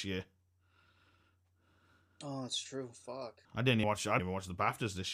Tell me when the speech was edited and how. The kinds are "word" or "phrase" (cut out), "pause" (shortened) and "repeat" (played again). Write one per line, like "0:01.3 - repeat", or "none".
0:03.4 - pause
0:03.8 - word
0:04.2 - word